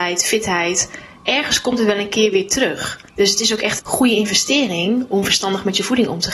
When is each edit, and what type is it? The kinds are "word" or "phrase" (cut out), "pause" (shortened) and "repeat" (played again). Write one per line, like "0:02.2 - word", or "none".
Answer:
0:03.1 - pause
0:03.8 - word